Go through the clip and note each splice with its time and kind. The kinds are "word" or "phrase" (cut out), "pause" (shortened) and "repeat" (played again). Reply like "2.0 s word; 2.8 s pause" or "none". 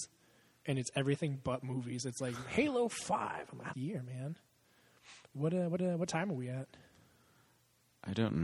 3.7 s phrase; 5.8 s repeat